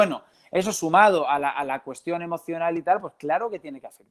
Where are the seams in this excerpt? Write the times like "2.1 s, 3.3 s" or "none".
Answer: none

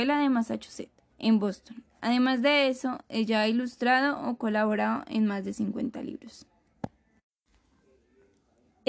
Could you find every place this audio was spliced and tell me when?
1.1 s

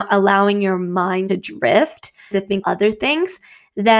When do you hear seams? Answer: 1.3 s, 2.3 s, 2.6 s

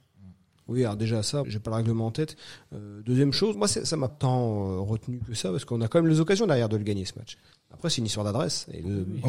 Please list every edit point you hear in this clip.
1.4 s, 3.5 s, 4.1 s

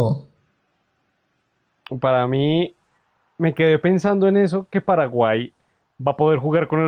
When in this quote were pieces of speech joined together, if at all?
none

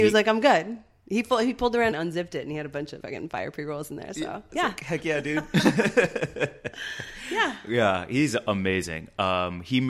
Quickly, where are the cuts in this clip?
1.9 s, 3.0 s, 4.5 s

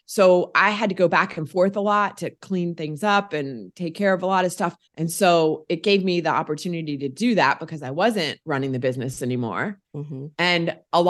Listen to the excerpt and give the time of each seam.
4.9 s, 8.4 s, 9.8 s

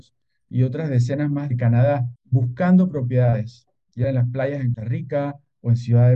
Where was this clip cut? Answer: 1.5 s, 2.2 s, 4.0 s, 4.7 s

